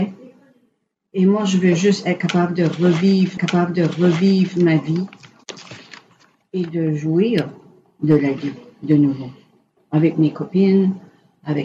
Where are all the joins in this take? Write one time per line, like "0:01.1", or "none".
0:03.4